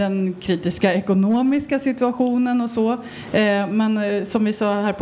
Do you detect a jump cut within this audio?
no; 0 cuts

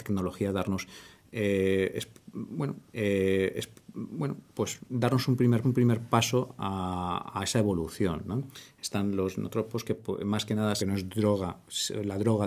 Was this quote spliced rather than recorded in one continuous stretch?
yes; 3 cuts; at 2.9 s, 5.6 s, 10.8 s

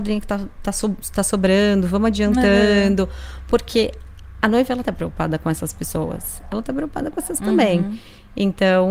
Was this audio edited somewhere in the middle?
yes; 3 cuts; at 4.8 s, 6.5 s, 7.4 s

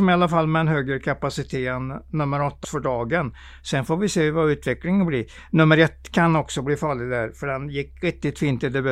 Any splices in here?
yes; 1 cut; at 2.6 s

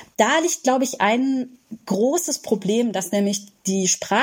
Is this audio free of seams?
yes; 0 cuts

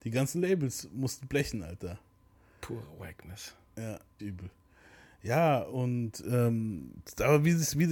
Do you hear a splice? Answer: yes; 1 cut; at 4.2 s

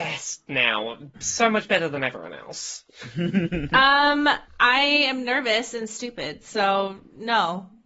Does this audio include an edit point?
yes; 1 cut; at 4.5 s

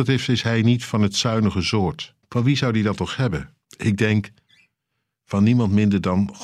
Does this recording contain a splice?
yes; 2 cuts; at 2.2 s, 3.6 s

